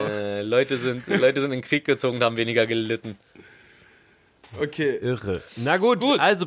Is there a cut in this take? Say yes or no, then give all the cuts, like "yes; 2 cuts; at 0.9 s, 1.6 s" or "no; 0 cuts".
yes; 1 cut; at 5.5 s